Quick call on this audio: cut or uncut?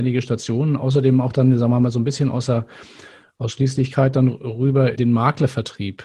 cut